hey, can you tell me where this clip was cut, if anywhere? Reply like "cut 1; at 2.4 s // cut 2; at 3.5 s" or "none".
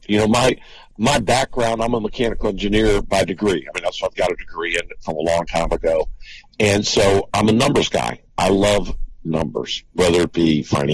cut 1; at 9.9 s